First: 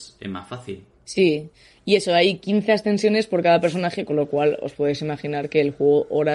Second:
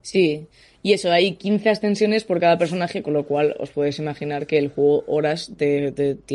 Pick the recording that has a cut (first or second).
first